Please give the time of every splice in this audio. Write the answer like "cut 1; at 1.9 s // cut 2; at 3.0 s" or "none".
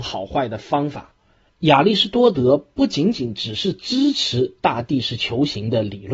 none